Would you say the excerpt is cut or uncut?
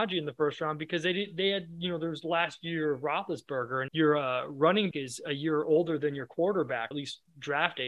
cut